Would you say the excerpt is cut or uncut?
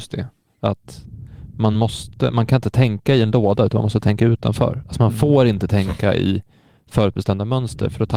uncut